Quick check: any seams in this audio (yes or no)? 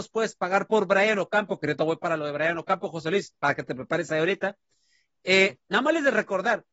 no